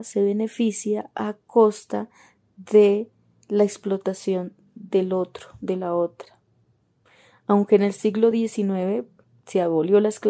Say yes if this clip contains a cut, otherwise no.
no